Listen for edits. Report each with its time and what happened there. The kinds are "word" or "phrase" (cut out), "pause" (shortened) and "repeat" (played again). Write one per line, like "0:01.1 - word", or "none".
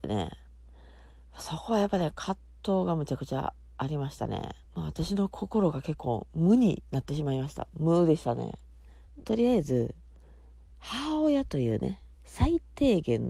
0:04.6 - pause
0:12.1 - pause